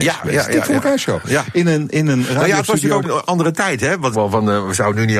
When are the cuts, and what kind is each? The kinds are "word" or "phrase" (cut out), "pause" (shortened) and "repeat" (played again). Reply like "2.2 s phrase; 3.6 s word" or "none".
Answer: 3.0 s word; 4.1 s phrase